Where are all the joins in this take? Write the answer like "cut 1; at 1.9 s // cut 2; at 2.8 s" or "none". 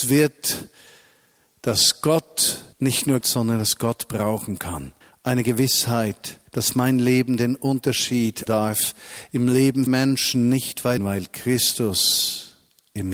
cut 1; at 2.7 s // cut 2; at 3.2 s // cut 3; at 5.0 s // cut 4; at 6.5 s // cut 5; at 8.5 s // cut 6; at 9.9 s // cut 7; at 11.0 s